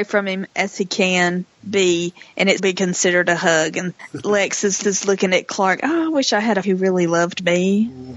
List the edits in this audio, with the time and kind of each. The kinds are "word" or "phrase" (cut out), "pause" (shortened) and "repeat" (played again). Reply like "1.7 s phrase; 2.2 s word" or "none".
2.6 s word; 4.0 s word; 4.8 s repeat; 5.8 s word; 6.6 s word